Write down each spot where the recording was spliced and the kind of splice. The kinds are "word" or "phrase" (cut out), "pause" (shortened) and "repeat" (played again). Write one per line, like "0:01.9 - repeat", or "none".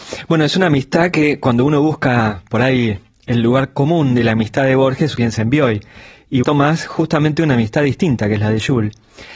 0:05.2 - word
0:06.4 - word